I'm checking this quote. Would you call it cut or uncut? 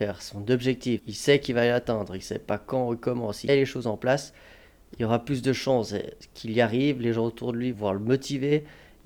cut